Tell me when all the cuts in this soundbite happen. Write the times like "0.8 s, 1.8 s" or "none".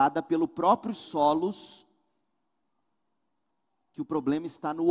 0.9 s